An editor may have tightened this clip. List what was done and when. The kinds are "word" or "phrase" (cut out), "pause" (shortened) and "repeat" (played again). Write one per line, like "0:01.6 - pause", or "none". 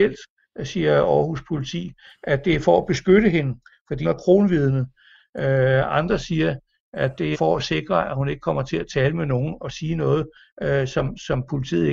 0:04.0 - word
0:07.3 - word